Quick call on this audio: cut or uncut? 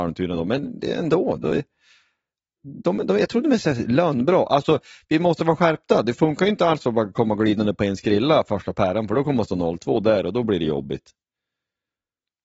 uncut